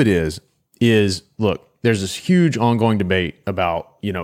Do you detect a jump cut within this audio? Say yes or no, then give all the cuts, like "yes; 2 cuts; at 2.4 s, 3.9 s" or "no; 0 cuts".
no; 0 cuts